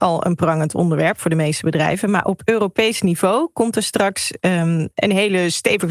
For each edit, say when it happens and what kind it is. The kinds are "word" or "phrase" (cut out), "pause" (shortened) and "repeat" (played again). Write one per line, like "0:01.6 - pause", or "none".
none